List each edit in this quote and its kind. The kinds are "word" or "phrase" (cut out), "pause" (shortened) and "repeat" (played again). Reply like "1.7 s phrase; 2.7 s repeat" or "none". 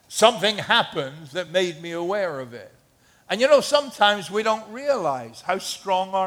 none